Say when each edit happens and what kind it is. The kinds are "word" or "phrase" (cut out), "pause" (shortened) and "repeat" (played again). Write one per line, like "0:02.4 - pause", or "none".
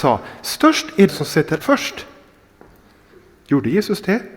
0:01.1 - word
0:01.6 - word

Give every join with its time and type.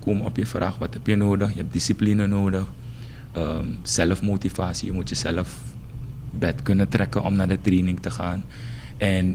0:06.3 - word

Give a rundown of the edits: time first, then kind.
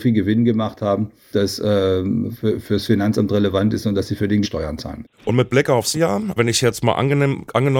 0:01.3 - word
0:04.4 - word
0:05.1 - pause
0:05.9 - word
0:06.4 - word

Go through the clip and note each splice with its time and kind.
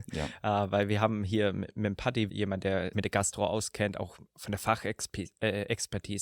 0:02.3 - word
0:02.9 - word

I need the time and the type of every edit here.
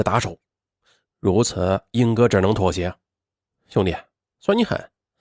none

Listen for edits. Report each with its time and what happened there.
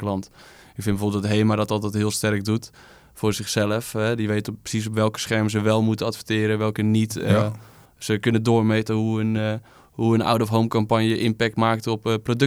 none

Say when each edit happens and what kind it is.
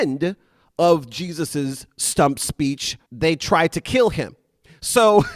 0:03.1 - pause

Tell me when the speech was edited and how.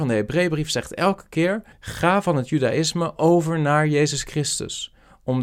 0:01.7 - pause

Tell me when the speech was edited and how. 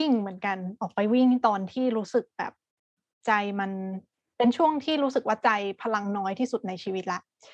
none

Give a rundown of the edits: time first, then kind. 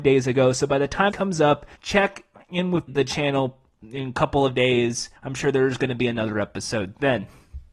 0:01.1 - word
0:01.7 - pause
0:02.9 - word
0:05.2 - pause

